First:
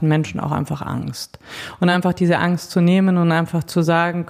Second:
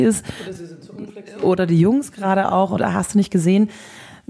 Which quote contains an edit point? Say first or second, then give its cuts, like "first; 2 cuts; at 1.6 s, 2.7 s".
second; 1 cut; at 2.8 s